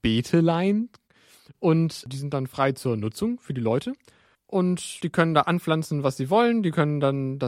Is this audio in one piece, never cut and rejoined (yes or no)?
yes